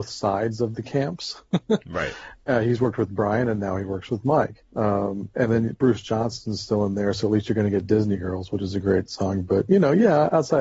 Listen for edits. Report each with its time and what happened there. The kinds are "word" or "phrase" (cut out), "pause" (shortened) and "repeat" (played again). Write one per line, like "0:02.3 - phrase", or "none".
0:04.7 - pause